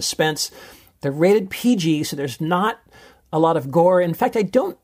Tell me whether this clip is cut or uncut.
uncut